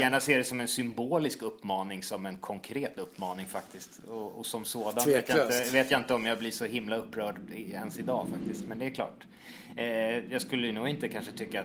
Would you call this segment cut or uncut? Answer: uncut